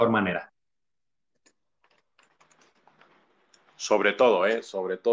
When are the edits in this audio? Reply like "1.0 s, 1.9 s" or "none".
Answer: none